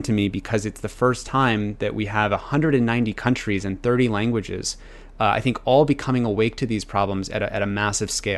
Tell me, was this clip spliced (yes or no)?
no